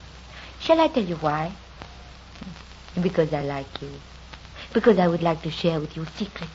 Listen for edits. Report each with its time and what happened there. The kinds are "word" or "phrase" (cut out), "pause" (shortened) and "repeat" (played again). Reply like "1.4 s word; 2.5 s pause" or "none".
none